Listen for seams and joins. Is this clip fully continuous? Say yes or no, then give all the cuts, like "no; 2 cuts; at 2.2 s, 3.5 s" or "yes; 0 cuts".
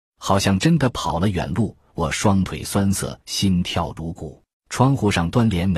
no; 2 cuts; at 3.2 s, 4.5 s